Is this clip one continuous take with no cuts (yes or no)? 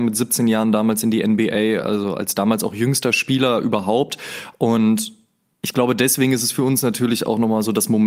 yes